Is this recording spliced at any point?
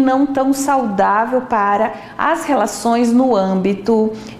no; 0 cuts

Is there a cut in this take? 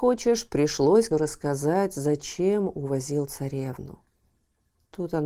yes; 1 cut; at 1.1 s

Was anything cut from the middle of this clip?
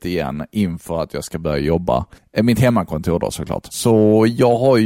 yes; 1 cut; at 2.2 s

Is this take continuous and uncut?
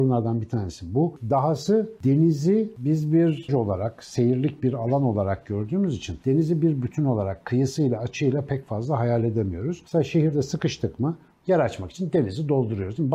no; 1 cut; at 3.5 s

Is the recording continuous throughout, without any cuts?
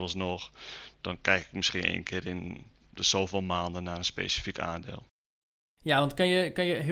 yes; 0 cuts

